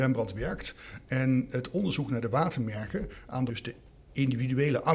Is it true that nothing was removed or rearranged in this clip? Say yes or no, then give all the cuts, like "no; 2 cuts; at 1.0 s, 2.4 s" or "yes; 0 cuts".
no; 1 cut; at 3.5 s